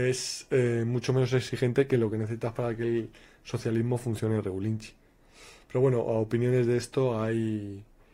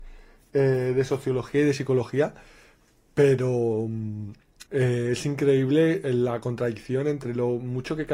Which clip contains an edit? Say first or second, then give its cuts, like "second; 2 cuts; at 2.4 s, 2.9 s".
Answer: second; 1 cut; at 4.7 s